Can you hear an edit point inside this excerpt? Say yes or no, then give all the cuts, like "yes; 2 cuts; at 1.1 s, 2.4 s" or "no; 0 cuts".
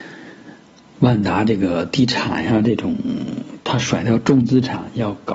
yes; 1 cut; at 3.6 s